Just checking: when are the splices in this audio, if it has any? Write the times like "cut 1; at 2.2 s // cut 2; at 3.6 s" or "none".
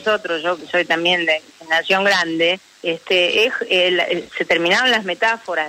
cut 1; at 2.6 s